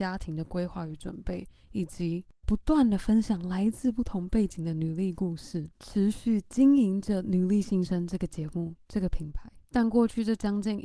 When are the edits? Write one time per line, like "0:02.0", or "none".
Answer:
0:05.7
0:09.6